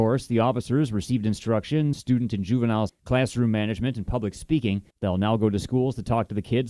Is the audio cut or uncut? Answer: cut